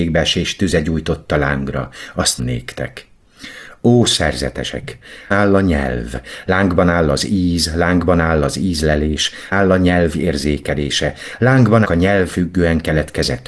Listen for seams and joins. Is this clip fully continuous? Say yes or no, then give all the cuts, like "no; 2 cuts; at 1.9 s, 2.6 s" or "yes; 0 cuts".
no; 5 cuts; at 2.4 s, 5.3 s, 9.5 s, 11.8 s, 12.3 s